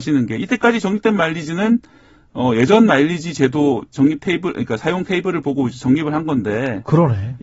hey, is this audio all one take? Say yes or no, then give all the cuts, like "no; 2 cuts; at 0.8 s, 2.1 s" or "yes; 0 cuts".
yes; 0 cuts